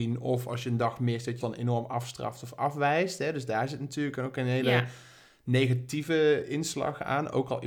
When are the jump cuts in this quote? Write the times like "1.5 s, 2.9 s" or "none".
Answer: 1.4 s